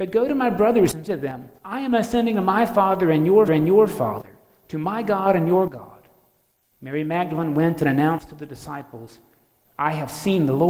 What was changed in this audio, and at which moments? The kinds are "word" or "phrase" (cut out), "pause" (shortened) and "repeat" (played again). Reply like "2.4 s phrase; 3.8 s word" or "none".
1.1 s word; 1.6 s pause; 3.5 s repeat